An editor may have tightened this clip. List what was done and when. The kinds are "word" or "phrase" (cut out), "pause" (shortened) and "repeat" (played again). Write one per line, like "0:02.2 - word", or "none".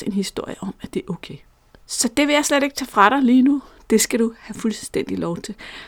none